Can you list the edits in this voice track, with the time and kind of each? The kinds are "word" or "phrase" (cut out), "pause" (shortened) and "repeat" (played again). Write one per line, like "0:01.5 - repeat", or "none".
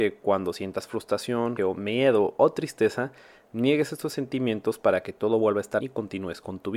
0:01.6 - word
0:05.8 - word